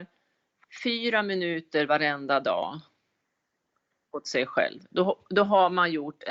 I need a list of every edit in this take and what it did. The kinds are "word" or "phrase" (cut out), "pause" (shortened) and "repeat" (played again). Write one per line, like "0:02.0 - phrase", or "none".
none